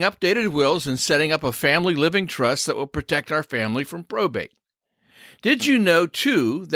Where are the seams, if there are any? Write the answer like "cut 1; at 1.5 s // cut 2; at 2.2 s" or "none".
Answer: none